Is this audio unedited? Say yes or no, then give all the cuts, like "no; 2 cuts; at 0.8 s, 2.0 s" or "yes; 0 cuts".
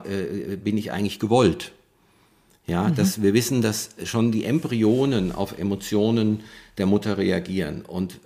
yes; 0 cuts